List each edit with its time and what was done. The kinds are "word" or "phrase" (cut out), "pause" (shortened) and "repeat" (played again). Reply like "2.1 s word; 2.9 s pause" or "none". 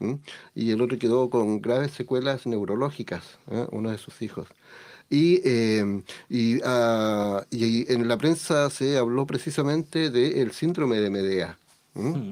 none

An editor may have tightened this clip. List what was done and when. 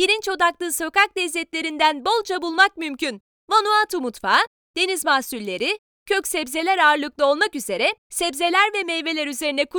8.0 s pause

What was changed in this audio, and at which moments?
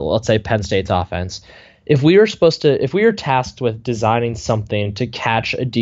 none

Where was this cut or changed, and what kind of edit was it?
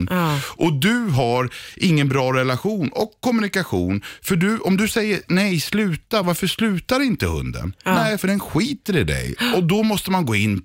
none

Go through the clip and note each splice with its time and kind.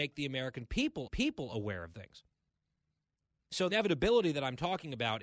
1.1 s repeat; 1.9 s word; 3.7 s word

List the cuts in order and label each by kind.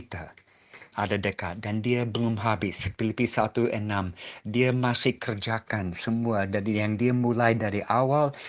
0.9 s phrase

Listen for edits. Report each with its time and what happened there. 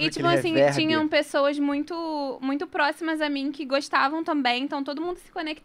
none

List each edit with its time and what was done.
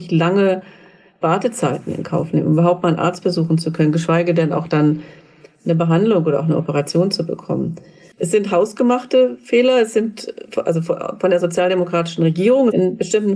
none

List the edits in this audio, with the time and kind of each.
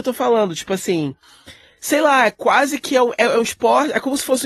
none

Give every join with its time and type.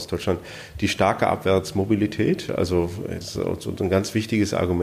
3.2 s word

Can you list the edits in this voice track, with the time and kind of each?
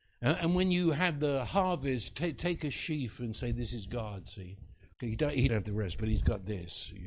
4.9 s pause; 5.5 s word

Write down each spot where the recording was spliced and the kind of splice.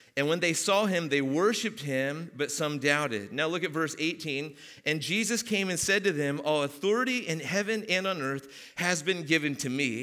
none

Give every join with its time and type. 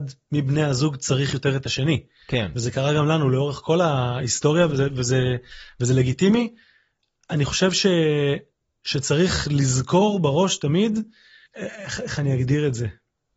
none

